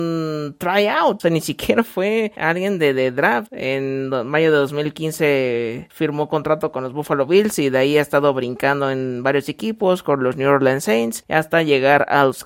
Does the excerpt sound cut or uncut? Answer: uncut